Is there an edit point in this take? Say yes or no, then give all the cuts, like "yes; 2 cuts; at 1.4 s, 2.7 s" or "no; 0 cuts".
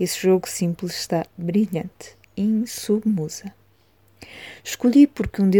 yes; 1 cut; at 2.2 s